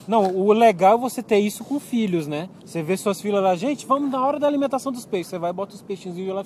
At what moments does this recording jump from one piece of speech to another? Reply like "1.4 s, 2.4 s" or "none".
2.6 s